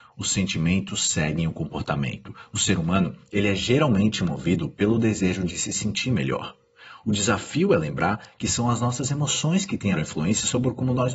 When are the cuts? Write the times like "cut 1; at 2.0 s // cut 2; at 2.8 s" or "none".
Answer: cut 1; at 9.9 s

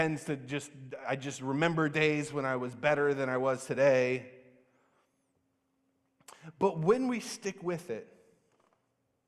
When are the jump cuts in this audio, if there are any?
none

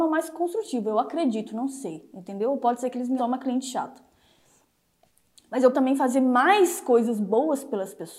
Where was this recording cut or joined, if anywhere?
cut 1; at 3.2 s // cut 2; at 5.7 s

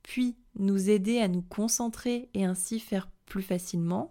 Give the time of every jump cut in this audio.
none

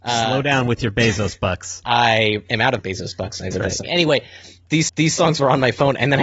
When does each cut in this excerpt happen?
cut 1; at 1.8 s // cut 2; at 3.5 s // cut 3; at 4.9 s

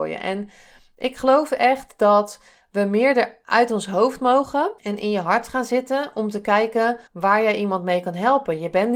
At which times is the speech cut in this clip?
cut 1; at 4.8 s // cut 2; at 7.1 s

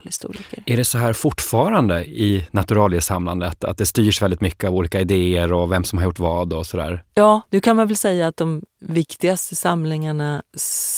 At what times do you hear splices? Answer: cut 1; at 7.5 s

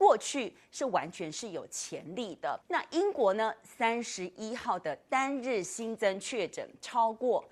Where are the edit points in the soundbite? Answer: cut 1; at 2.6 s

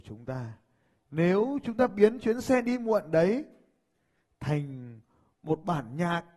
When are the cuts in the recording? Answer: none

